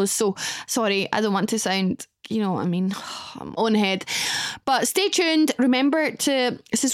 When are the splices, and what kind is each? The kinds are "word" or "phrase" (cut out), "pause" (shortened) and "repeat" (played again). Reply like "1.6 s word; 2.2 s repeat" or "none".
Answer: 2.2 s word; 3.6 s phrase